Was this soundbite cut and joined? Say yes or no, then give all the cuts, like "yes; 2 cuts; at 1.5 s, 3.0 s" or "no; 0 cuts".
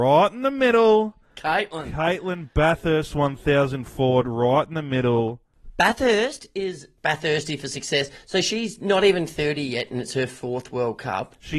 no; 0 cuts